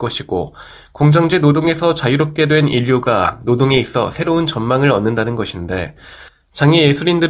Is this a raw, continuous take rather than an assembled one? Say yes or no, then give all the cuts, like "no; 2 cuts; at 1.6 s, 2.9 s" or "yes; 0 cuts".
yes; 0 cuts